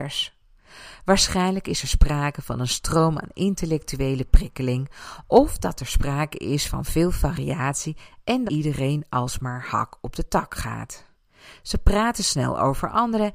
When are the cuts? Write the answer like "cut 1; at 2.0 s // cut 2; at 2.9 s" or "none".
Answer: cut 1; at 8.5 s